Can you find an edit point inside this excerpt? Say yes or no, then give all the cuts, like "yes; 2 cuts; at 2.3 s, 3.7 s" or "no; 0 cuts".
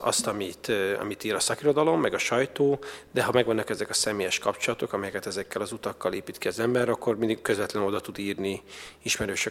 no; 0 cuts